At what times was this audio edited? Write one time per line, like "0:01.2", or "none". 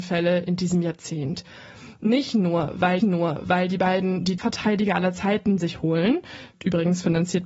0:03.0
0:04.4